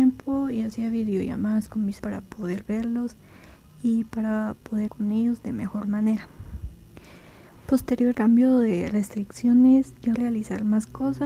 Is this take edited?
yes; 4 cuts; at 2.0 s, 4.9 s, 8.1 s, 10.2 s

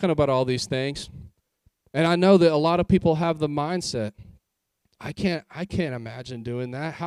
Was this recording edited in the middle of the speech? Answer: no; 0 cuts

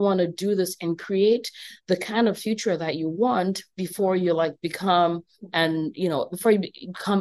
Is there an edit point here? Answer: no; 0 cuts

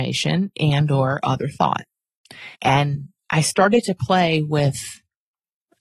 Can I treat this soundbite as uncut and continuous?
no; 1 cut; at 2.5 s

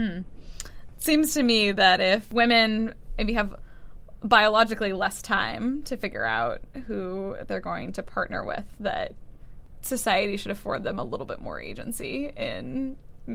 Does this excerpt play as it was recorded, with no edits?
yes; 0 cuts

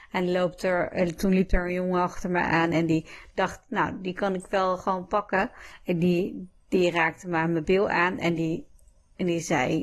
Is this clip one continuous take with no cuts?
yes; 0 cuts

